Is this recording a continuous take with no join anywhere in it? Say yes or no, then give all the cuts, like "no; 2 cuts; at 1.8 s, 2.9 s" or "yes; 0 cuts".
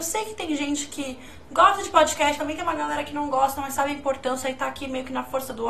no; 1 cut; at 2.4 s